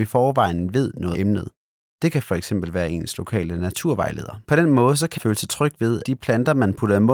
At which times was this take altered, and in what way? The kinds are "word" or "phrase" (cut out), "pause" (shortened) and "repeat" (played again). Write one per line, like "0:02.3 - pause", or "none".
0:01.1 - word
0:04.4 - pause
0:05.2 - word
0:06.0 - word